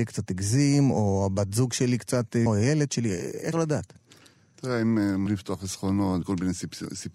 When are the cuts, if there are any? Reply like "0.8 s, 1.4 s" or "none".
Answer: 2.5 s, 3.5 s, 5.3 s, 6.2 s